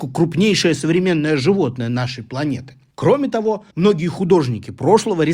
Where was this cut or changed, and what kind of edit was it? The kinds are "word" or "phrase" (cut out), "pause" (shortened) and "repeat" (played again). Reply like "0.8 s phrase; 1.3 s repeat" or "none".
3.7 s pause